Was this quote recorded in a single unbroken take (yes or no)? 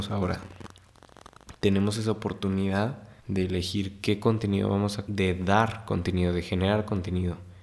no